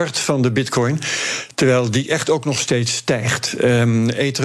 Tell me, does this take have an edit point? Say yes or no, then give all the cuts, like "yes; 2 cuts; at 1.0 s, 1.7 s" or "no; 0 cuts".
no; 0 cuts